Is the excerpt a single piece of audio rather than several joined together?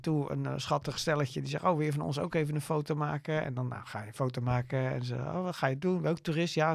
yes; 0 cuts

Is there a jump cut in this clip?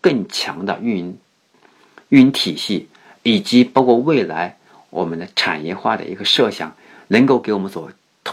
no; 0 cuts

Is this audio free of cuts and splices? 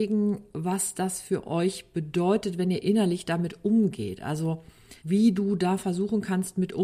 no; 1 cut; at 5.0 s

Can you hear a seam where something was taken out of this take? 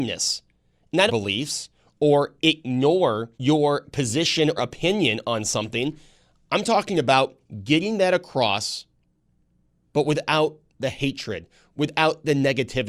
yes; 4 cuts; at 1.1 s, 3.3 s, 4.6 s, 5.2 s

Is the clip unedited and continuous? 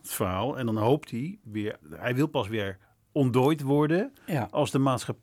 no; 1 cut; at 1.8 s

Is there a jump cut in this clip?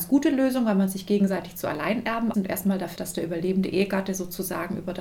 yes; 2 cuts; at 2.3 s, 3.0 s

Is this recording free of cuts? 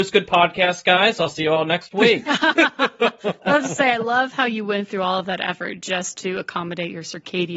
yes; 0 cuts

